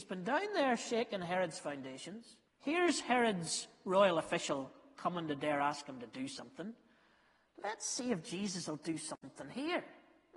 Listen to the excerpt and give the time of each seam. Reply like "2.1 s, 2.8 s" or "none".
2.5 s